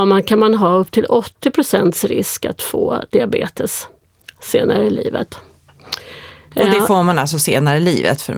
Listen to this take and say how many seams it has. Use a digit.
0